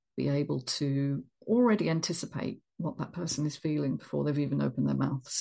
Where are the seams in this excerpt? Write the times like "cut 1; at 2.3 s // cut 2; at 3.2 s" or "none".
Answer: cut 1; at 1.3 s